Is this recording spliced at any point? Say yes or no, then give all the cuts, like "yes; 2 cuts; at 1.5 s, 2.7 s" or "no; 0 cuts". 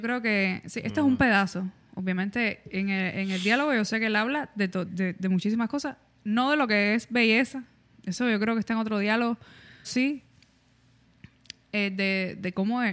yes; 2 cuts; at 4.9 s, 9.8 s